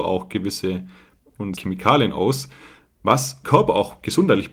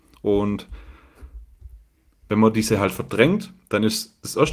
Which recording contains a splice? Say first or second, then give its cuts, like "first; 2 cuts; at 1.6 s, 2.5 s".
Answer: first; 3 cuts; at 1.2 s, 1.6 s, 3.4 s